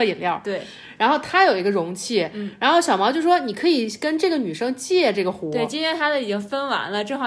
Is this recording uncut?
yes; 0 cuts

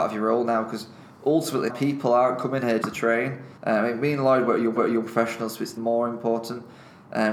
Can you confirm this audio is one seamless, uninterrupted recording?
no; 5 cuts; at 1.7 s, 2.8 s, 3.6 s, 4.8 s, 5.8 s

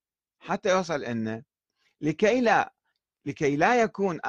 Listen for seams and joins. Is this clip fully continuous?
yes; 0 cuts

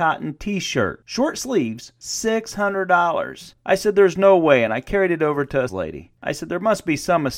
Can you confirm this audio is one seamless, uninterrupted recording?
no; 1 cut; at 5.7 s

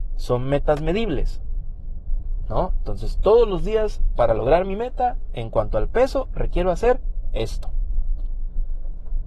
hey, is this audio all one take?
yes; 0 cuts

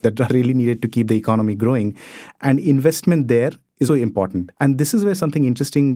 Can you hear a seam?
yes; 2 cuts; at 3.9 s, 4.5 s

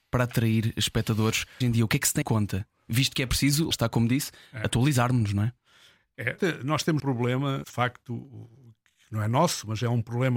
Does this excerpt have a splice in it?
yes; 6 cuts; at 1.6 s, 2.2 s, 3.7 s, 6.4 s, 7.0 s, 7.6 s

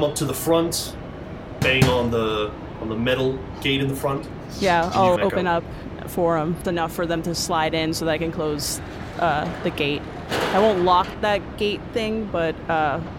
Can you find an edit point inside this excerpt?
yes; 3 cuts; at 5.2 s, 6.6 s, 11.1 s

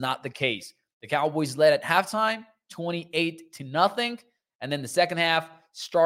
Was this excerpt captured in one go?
yes; 0 cuts

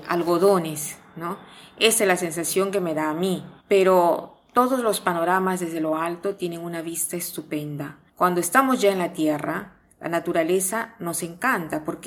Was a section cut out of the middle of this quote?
yes; 2 cuts; at 3.6 s, 8.1 s

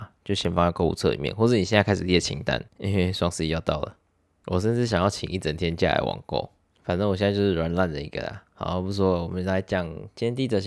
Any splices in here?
yes; 1 cut; at 2.7 s

